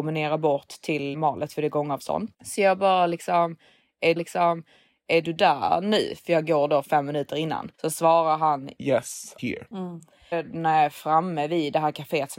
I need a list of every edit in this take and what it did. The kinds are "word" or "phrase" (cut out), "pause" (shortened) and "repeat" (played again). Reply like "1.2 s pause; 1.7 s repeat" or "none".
1.1 s word; 2.3 s pause; 4.2 s repeat; 7.7 s pause; 9.4 s phrase; 10.3 s phrase